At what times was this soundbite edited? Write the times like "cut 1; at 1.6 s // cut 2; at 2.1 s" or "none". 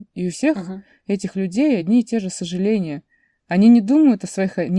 none